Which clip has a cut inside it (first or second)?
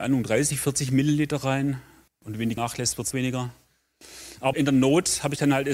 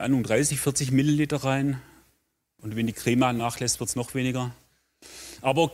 first